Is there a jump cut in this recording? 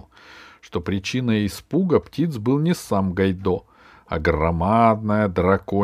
no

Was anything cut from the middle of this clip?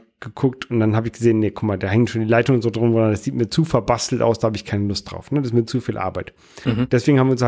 no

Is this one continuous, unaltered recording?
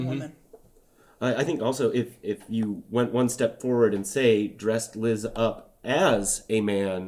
yes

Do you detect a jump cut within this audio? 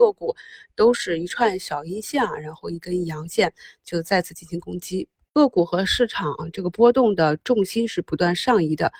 no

